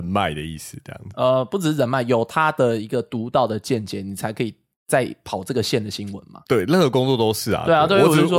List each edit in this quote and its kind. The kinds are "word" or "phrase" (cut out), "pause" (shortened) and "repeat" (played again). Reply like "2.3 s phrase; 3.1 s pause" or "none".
4.7 s pause